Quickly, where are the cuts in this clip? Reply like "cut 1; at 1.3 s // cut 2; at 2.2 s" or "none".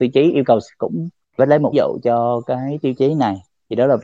cut 1; at 1.4 s // cut 2; at 1.7 s